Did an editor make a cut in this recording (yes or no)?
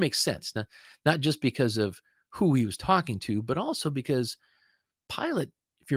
no